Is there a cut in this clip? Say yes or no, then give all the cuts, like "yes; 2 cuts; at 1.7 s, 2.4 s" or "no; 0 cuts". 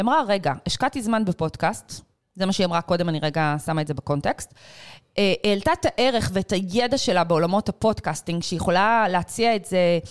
no; 0 cuts